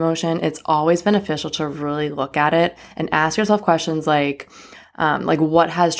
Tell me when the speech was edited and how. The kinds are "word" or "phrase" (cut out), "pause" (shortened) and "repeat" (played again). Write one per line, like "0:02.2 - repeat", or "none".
none